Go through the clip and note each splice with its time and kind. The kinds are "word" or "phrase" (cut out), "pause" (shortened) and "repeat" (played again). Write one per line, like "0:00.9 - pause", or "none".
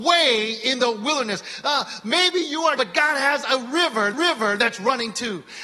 0:02.8 - word
0:04.1 - repeat